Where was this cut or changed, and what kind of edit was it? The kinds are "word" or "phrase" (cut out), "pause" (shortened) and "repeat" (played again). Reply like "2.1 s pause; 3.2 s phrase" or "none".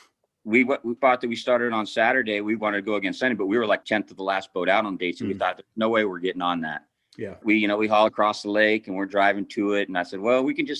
1.0 s phrase; 3.8 s word; 7.4 s word; 8.1 s word

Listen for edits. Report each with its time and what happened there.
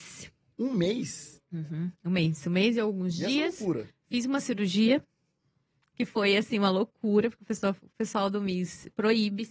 2.0 s pause

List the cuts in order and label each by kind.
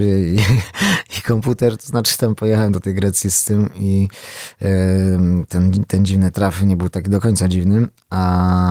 none

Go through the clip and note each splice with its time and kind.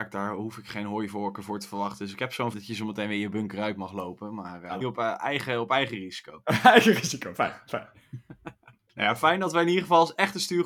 2.5 s word; 4.8 s phrase

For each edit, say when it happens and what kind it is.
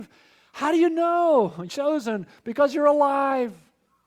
1.7 s word

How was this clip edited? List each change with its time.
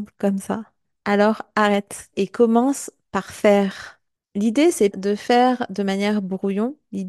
2.1 s word; 4.1 s pause; 4.9 s word

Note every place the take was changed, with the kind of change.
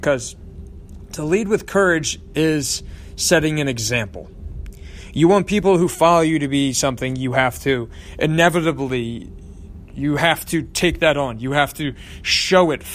none

